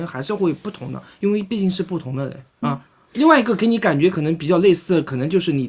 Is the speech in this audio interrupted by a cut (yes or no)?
yes